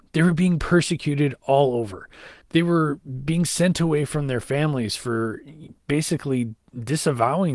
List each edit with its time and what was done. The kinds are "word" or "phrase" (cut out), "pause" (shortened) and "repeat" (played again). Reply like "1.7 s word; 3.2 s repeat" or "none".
2.4 s pause